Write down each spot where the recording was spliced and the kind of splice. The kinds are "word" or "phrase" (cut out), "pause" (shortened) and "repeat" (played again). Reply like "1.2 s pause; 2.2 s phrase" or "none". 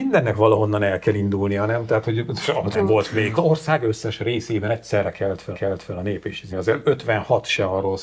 2.7 s word; 3.4 s phrase; 5.5 s repeat; 6.5 s word